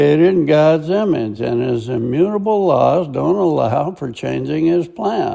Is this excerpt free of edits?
yes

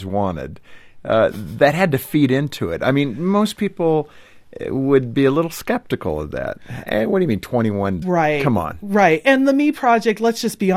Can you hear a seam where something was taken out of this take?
yes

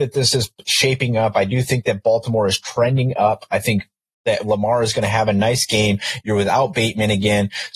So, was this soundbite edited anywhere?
no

